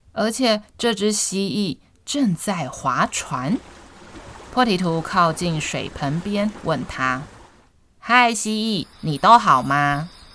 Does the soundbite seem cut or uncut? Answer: cut